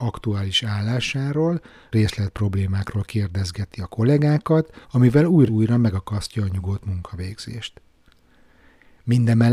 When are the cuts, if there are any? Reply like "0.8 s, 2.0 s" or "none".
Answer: 1.9 s, 4.8 s, 5.5 s